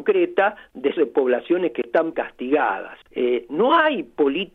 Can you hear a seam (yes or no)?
yes